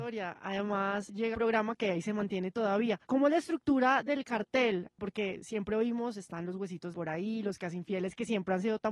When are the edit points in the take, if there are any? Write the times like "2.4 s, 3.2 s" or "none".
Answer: 1.3 s, 3.0 s, 6.9 s